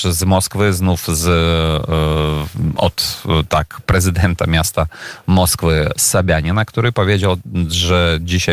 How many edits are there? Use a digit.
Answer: 0